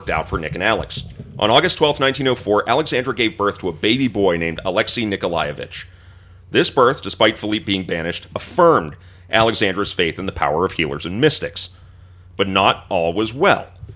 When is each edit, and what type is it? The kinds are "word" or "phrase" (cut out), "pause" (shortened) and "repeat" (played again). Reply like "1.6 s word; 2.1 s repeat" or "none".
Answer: none